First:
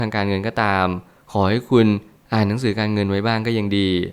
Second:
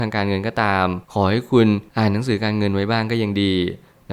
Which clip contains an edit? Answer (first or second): second